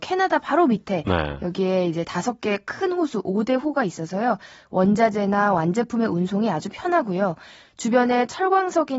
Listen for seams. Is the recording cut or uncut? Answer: uncut